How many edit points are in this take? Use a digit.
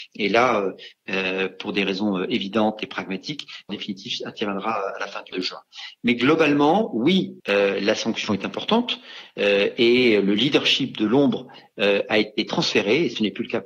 3